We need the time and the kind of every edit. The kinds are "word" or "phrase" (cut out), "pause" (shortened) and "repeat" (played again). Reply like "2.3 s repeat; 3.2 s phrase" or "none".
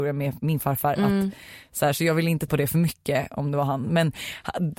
2.5 s word